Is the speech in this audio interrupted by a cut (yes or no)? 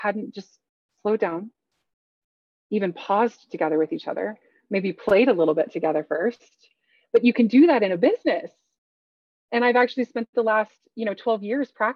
no